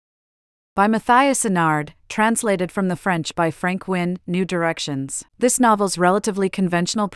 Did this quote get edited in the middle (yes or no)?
yes